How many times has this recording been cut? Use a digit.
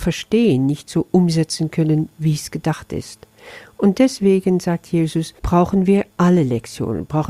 2